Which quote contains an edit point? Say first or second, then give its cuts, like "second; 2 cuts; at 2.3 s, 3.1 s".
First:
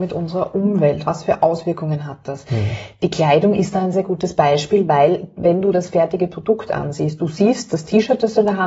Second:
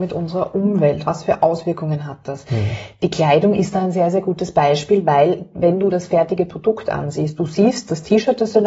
first; 1 cut; at 3.9 s